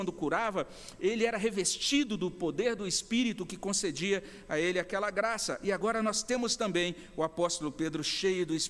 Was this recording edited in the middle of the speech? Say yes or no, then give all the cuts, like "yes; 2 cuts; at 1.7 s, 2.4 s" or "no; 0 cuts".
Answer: no; 0 cuts